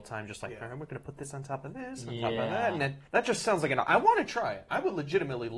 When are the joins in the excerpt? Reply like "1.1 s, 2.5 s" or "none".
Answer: 3.1 s

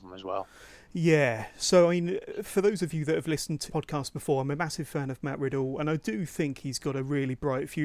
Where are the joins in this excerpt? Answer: 3.7 s

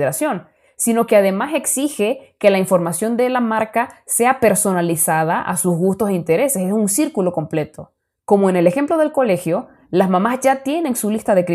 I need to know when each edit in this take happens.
none

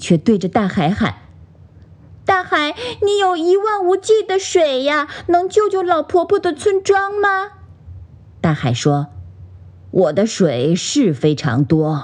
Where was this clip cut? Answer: none

